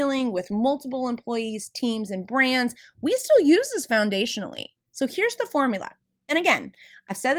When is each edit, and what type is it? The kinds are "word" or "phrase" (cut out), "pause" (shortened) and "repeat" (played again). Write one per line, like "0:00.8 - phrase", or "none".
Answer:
none